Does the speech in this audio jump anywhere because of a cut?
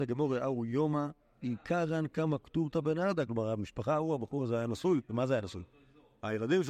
no; 0 cuts

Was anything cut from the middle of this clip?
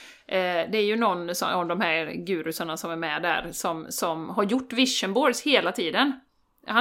no; 0 cuts

